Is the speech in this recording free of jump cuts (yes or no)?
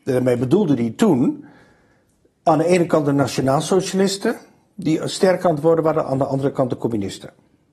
yes